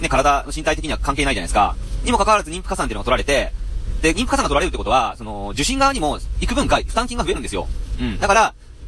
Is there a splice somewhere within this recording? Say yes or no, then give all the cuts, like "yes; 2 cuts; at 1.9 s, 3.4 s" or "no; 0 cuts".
no; 0 cuts